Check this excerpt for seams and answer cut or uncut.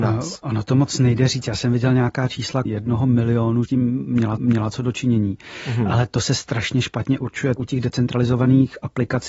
cut